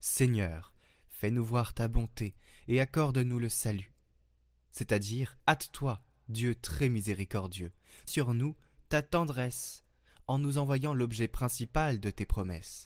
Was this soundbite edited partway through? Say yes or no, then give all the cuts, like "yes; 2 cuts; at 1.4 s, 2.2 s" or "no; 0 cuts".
yes; 2 cuts; at 5.4 s, 8.1 s